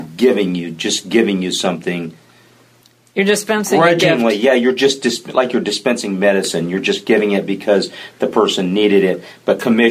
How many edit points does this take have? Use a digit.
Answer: 0